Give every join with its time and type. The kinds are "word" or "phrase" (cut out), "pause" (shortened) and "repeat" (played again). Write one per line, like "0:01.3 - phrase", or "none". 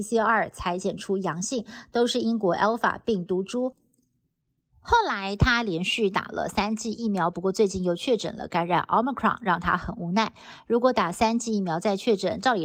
none